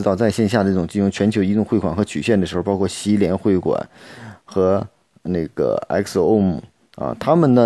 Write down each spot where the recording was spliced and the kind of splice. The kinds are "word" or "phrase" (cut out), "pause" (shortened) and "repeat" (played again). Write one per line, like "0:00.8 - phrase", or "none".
none